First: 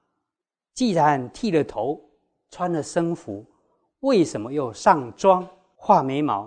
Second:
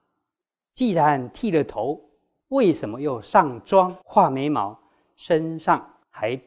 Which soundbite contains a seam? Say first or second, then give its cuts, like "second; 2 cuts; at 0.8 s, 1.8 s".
second; 2 cuts; at 2.4 s, 4.0 s